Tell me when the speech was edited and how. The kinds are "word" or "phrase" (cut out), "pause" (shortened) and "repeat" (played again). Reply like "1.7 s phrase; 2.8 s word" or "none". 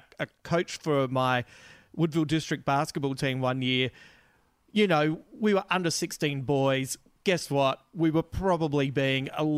none